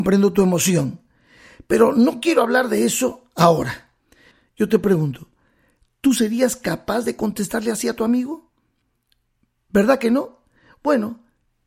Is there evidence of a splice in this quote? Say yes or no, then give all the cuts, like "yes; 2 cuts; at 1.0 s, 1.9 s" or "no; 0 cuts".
no; 0 cuts